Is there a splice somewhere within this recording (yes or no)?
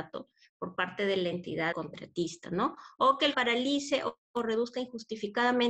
yes